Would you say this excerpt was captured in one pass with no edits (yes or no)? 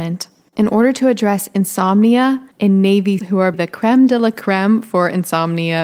no